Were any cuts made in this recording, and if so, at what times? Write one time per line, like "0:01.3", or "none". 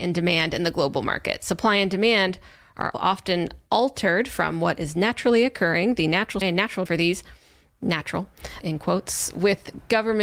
0:02.9
0:06.4
0:06.9
0:08.6